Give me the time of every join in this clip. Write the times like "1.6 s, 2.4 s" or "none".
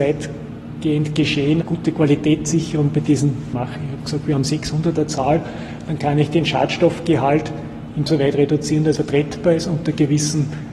1.6 s, 3.5 s, 5.0 s, 8.1 s, 9.0 s

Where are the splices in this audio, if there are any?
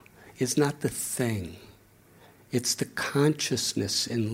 none

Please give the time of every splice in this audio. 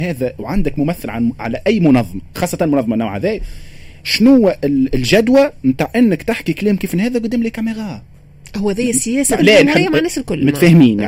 9.4 s

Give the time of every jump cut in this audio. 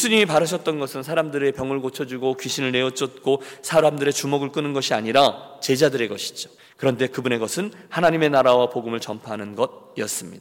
6.6 s

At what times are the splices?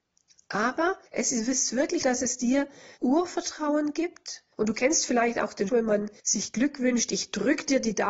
1.1 s, 2.0 s, 3.0 s, 4.5 s, 5.7 s, 6.2 s

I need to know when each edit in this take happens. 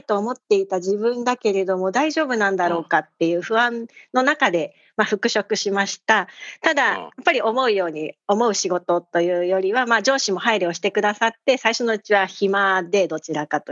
none

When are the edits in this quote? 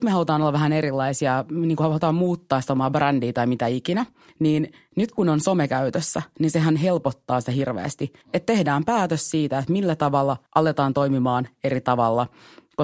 4.2 s, 8.2 s, 10.5 s

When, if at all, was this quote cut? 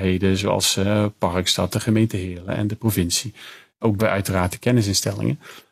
4.0 s

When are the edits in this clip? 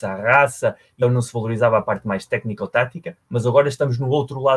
1.0 s

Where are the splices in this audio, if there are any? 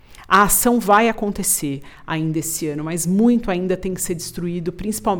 none

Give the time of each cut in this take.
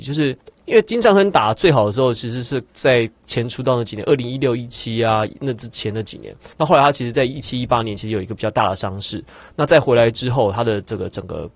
none

